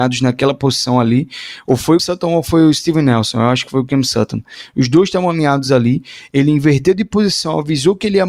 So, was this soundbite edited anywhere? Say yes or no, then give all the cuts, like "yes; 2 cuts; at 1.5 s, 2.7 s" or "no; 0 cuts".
yes; 1 cut; at 2.0 s